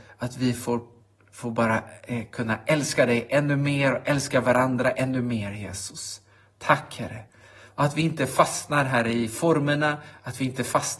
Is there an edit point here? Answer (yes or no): no